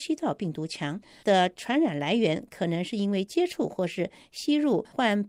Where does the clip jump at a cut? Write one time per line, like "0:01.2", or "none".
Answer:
0:01.2